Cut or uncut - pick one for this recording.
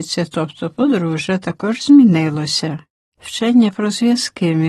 uncut